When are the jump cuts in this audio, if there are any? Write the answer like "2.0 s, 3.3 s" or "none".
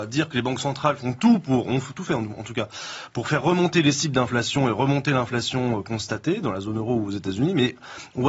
none